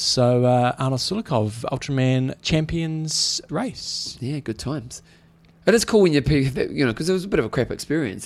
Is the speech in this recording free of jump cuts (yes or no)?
no